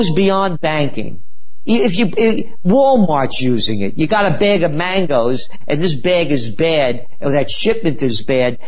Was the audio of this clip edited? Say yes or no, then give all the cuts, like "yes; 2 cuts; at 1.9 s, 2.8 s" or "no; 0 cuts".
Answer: no; 0 cuts